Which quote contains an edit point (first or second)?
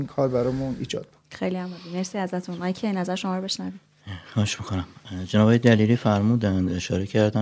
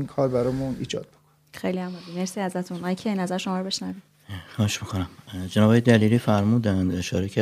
first